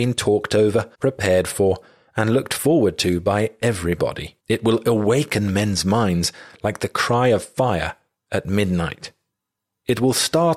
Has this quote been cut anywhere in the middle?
yes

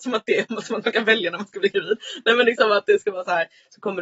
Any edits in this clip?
no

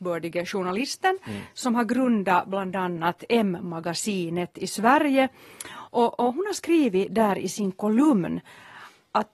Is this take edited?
no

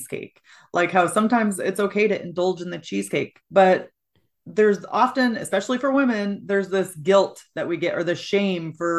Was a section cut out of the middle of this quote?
yes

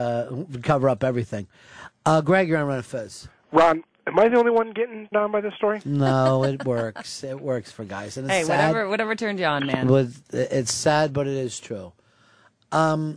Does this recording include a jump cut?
yes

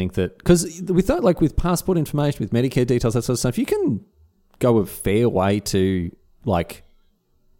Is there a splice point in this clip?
no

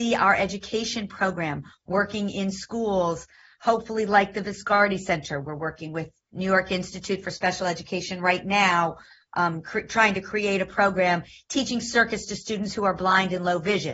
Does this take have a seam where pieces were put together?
no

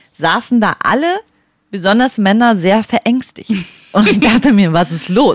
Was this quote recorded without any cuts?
yes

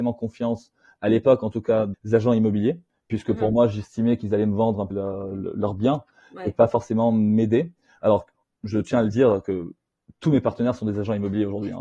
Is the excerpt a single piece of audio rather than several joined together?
no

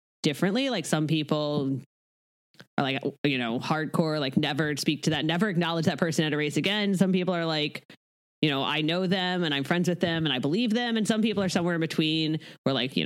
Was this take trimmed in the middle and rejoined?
no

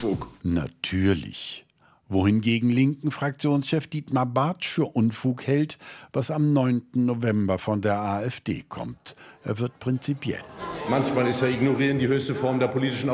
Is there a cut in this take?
no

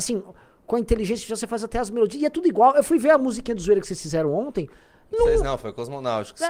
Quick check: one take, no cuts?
yes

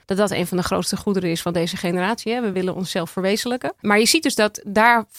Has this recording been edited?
no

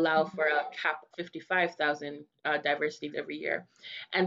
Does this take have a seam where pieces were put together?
yes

